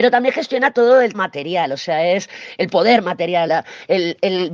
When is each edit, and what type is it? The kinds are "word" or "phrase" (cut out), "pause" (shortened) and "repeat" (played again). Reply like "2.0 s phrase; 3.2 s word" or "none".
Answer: 1.1 s word; 3.5 s word